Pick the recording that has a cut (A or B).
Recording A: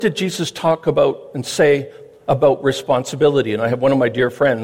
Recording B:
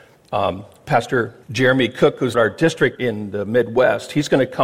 B